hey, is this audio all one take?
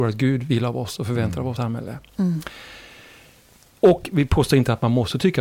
no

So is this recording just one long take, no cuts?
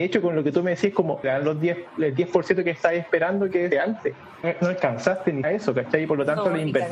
no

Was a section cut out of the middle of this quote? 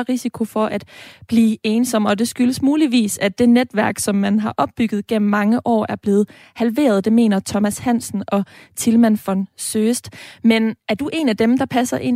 no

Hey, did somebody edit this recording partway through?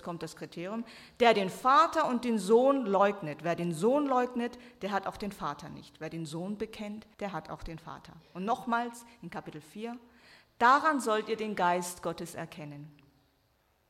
yes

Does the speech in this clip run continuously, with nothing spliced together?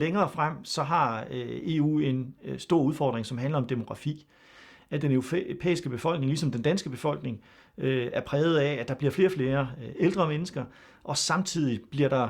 yes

